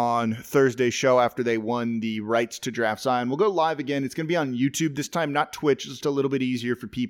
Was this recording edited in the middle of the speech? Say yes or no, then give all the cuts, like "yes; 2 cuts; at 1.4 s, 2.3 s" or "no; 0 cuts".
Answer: yes; 1 cut; at 6.0 s